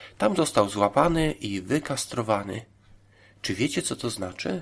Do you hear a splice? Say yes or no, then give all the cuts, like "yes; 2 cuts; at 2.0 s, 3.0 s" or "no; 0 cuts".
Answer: no; 0 cuts